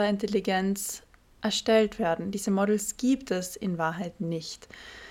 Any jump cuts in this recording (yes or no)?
no